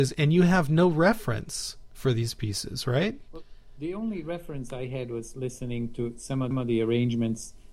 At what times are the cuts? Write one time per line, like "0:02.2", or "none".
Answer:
0:06.5